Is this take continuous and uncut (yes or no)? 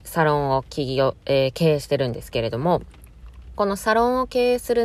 no